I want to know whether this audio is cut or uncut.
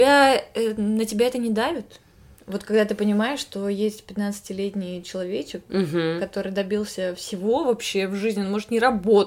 uncut